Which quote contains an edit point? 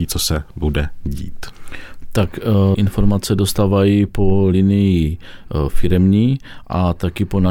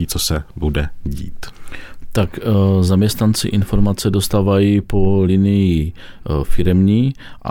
first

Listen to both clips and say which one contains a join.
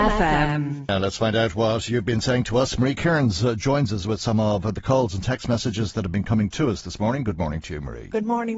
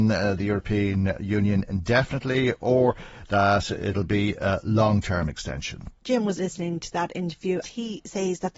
second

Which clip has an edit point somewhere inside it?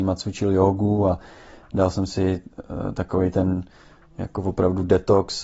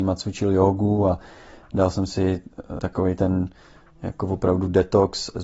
second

